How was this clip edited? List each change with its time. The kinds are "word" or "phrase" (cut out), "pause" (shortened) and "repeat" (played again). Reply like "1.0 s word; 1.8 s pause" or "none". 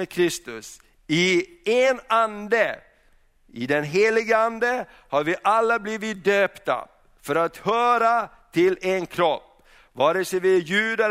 none